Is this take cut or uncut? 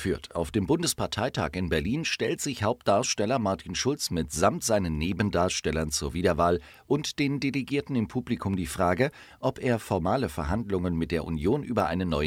uncut